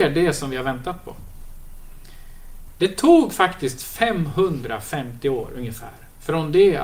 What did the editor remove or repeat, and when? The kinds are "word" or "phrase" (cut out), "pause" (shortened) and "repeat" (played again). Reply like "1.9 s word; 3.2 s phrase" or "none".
none